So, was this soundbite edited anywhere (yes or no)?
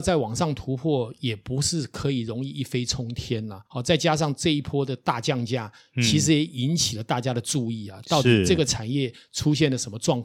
yes